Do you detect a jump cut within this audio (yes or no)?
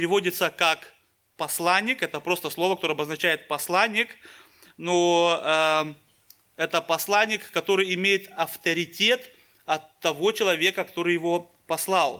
no